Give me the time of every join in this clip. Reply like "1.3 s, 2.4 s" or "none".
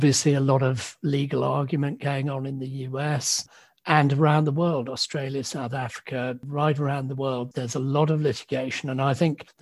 none